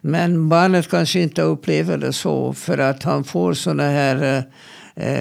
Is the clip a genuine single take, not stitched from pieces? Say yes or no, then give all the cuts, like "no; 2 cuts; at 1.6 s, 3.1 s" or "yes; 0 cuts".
yes; 0 cuts